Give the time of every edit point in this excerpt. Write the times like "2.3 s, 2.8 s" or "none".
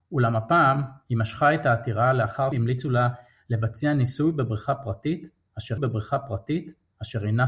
2.5 s, 5.8 s